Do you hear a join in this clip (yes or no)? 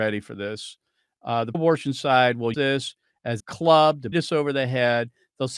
yes